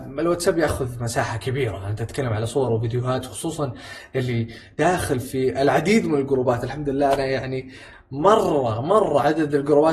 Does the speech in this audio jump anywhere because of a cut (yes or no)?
no